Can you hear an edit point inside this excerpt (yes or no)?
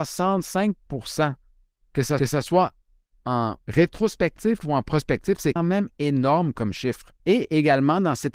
yes